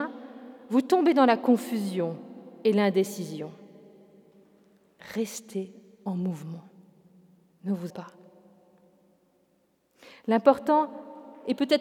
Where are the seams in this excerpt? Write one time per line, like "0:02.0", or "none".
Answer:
0:07.9